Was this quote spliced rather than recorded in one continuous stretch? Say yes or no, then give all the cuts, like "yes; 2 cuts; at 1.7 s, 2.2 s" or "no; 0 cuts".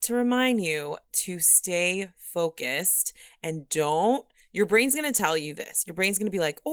no; 0 cuts